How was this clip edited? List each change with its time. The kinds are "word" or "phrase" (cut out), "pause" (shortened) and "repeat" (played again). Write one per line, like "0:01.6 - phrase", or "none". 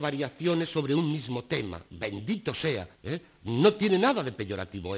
0:01.9 - pause
0:02.9 - pause